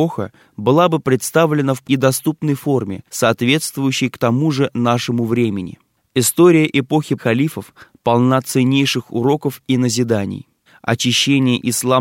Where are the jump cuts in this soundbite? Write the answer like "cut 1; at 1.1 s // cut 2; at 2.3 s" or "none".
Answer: cut 1; at 1.8 s // cut 2; at 3.1 s // cut 3; at 7.2 s // cut 4; at 10.7 s

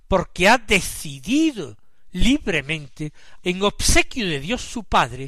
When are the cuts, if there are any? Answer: cut 1; at 3.4 s

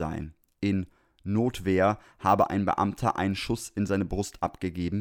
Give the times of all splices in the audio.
none

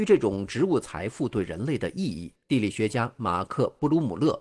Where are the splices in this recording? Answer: cut 1; at 2.4 s

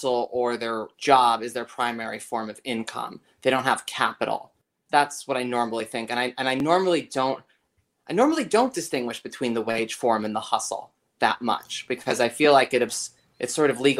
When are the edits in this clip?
none

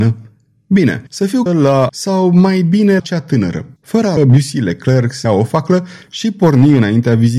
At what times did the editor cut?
cut 1; at 1.1 s // cut 2; at 1.5 s // cut 3; at 1.9 s // cut 4; at 3.0 s // cut 5; at 3.8 s // cut 6; at 4.2 s // cut 7; at 5.2 s

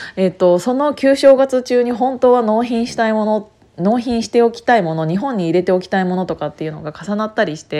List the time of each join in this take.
none

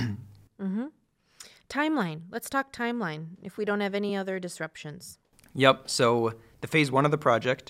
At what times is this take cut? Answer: none

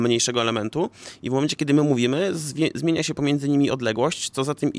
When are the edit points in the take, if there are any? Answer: none

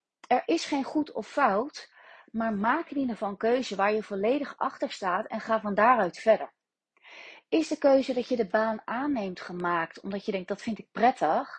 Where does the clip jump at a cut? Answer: none

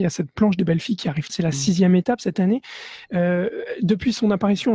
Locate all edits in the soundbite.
cut 1; at 1.3 s

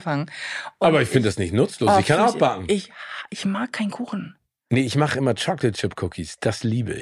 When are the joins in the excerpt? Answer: none

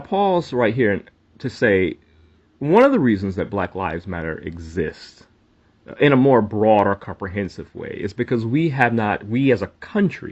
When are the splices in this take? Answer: none

